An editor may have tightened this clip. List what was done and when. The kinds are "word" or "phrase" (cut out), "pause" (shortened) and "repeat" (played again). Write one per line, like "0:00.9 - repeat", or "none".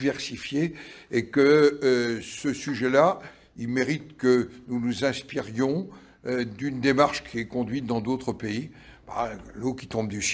none